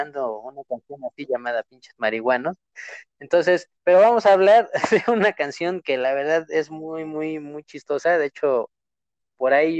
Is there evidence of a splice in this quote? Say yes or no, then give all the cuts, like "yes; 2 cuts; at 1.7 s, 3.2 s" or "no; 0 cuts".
yes; 1 cut; at 3.8 s